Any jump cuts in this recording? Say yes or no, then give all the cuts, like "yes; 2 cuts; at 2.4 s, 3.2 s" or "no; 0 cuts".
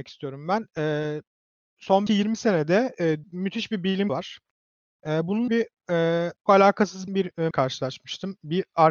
yes; 7 cuts; at 2.1 s, 3.2 s, 4.1 s, 5.5 s, 6.5 s, 7.1 s, 7.5 s